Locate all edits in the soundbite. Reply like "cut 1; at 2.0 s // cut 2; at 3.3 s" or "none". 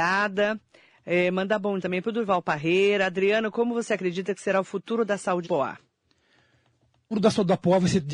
cut 1; at 1.8 s // cut 2; at 5.4 s // cut 3; at 7.1 s